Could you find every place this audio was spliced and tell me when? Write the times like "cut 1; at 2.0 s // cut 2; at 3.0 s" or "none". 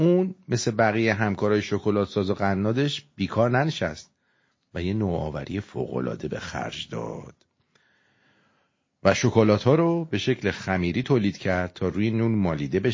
none

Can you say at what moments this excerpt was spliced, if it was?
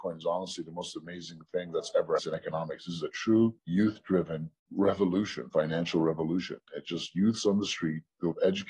cut 1; at 2.2 s // cut 2; at 3.6 s // cut 3; at 4.6 s

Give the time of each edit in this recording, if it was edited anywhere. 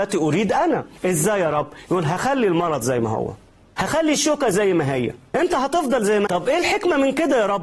cut 1; at 6.3 s

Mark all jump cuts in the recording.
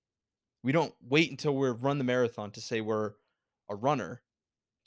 none

